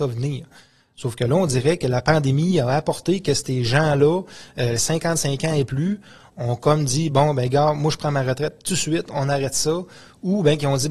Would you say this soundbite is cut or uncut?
uncut